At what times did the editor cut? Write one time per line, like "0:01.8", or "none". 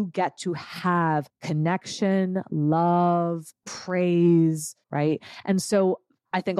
0:04.8